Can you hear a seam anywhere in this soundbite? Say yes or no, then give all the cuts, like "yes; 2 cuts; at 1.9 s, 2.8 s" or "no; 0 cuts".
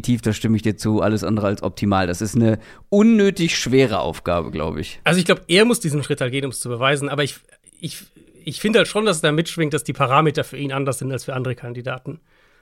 no; 0 cuts